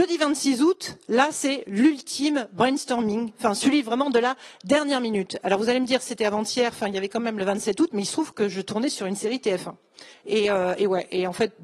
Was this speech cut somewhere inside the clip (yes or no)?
yes